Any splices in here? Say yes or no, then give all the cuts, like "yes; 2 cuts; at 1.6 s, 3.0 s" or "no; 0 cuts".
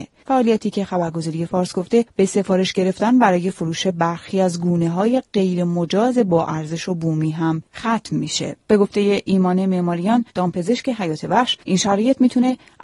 no; 0 cuts